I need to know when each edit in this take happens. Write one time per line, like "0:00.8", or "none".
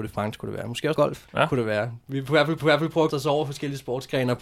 0:01.0
0:01.3
0:02.6
0:03.1